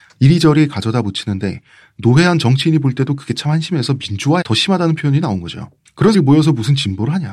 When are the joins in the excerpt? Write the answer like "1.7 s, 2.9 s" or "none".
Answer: 4.4 s, 6.1 s